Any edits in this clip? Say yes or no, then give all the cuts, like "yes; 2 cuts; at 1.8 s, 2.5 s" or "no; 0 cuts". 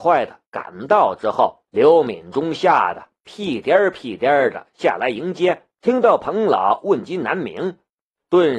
yes; 2 cuts; at 1.7 s, 5.8 s